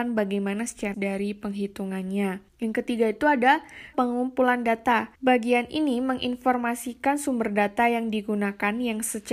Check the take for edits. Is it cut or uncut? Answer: cut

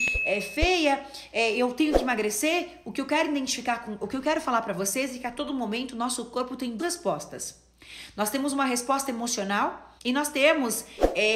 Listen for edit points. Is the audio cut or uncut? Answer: cut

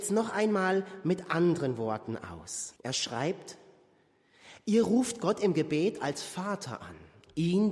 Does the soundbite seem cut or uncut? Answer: cut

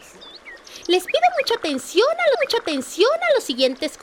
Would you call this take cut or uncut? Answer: cut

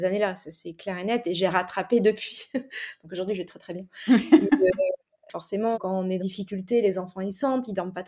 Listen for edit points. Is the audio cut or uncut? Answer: cut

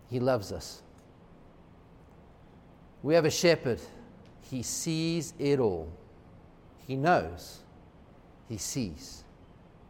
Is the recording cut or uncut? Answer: uncut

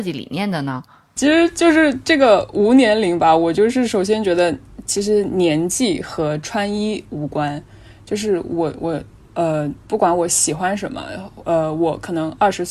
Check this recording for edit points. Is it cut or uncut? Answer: uncut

